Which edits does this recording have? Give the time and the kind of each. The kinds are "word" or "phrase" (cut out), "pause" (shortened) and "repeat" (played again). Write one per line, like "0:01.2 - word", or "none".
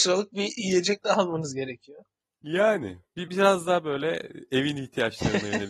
0:03.3 - word